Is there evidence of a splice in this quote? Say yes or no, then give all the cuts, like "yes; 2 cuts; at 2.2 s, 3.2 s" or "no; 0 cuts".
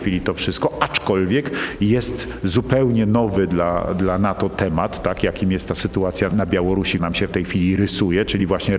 yes; 3 cuts; at 3.9 s, 6.3 s, 7.0 s